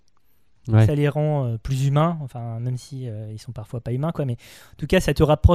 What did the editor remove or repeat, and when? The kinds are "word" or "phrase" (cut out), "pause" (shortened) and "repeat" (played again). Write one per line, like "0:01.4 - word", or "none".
none